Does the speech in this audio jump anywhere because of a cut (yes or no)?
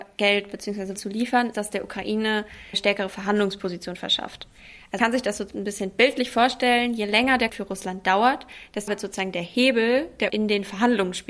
yes